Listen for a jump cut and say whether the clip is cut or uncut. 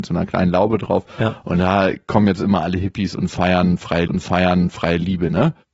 cut